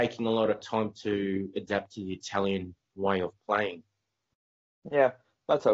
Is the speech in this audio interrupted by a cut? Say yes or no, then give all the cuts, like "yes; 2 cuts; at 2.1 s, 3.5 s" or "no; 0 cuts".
no; 0 cuts